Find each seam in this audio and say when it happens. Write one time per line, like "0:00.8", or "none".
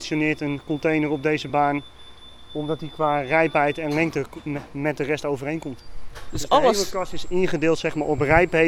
none